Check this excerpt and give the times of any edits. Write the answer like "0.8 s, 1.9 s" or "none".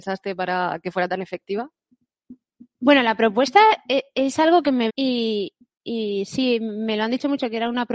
4.9 s